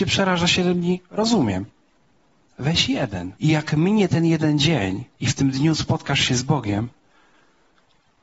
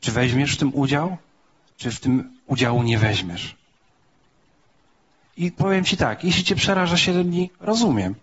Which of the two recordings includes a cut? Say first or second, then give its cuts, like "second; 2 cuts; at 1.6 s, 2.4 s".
first; 2 cuts; at 3.4 s, 5.1 s